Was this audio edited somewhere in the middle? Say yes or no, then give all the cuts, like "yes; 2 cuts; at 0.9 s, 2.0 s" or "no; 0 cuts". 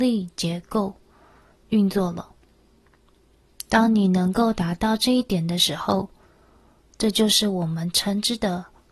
no; 0 cuts